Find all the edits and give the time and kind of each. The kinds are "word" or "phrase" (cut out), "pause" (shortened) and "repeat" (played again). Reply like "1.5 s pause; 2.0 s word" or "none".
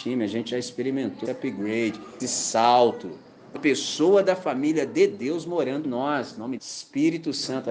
1.2 s word; 2.2 s word; 3.5 s word; 5.8 s word; 6.6 s word